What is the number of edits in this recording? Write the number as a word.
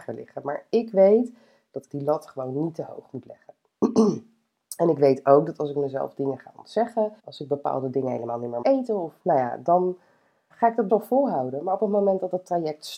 six